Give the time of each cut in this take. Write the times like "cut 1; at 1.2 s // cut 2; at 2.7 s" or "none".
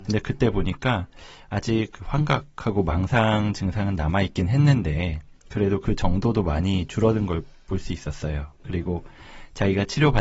none